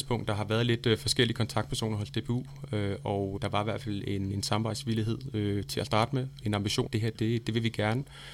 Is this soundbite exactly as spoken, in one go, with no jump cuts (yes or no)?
no